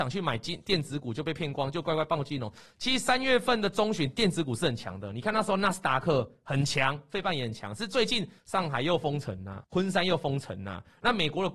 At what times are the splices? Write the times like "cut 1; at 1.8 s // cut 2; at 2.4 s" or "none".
cut 1; at 8.4 s // cut 2; at 9.6 s

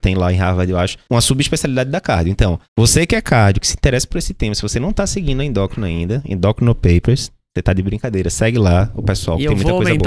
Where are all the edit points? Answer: cut 1; at 1.0 s // cut 2; at 2.6 s

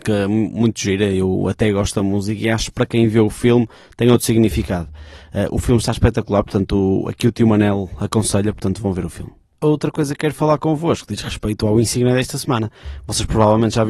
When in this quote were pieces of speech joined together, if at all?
cut 1; at 9.5 s

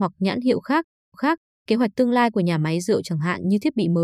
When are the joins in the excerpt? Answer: cut 1; at 1.1 s

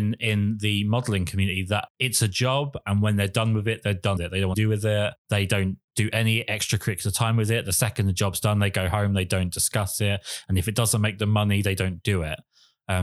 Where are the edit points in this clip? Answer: cut 1; at 4.2 s // cut 2; at 4.5 s

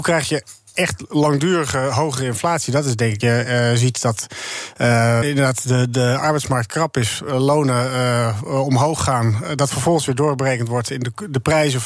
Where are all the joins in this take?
cut 1; at 3.2 s // cut 2; at 5.2 s

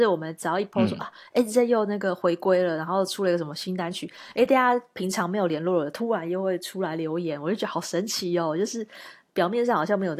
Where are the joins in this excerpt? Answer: none

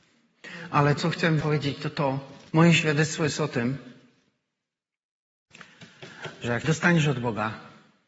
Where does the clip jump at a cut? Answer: cut 1; at 1.0 s // cut 2; at 1.4 s // cut 3; at 2.5 s // cut 4; at 6.6 s

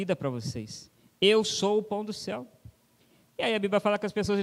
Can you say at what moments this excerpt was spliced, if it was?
none

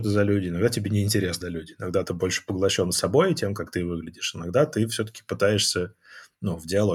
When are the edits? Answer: cut 1; at 1.4 s

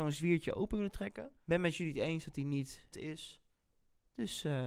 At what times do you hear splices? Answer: cut 1; at 2.9 s

